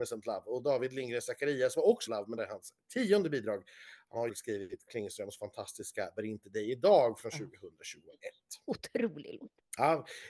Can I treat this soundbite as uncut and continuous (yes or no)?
no